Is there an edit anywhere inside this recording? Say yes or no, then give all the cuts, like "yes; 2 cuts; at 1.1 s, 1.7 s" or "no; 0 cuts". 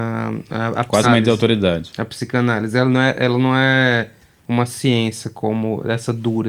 yes; 1 cut; at 1.0 s